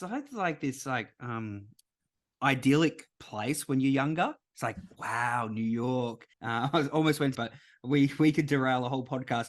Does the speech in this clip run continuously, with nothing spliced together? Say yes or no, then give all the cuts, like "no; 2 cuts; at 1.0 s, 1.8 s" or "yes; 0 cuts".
no; 2 cuts; at 6.3 s, 7.3 s